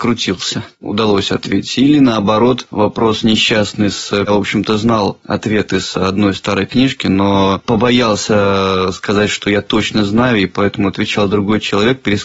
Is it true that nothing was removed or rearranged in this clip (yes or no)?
no